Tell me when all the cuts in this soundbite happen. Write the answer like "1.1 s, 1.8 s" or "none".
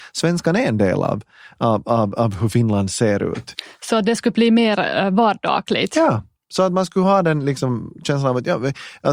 none